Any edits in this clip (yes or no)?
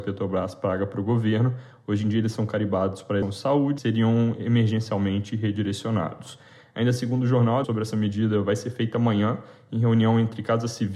yes